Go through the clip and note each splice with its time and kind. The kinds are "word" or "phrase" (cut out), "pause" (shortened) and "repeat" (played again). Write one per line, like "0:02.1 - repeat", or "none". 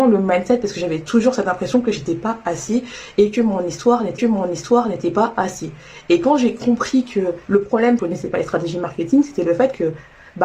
0:04.2 - repeat
0:07.4 - pause
0:08.0 - phrase